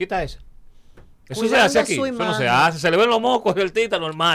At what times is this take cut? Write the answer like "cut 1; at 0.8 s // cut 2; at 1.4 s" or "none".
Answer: none